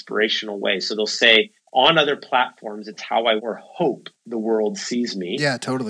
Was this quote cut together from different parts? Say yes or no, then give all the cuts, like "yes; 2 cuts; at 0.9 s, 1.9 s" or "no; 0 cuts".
yes; 2 cuts; at 1.6 s, 3.4 s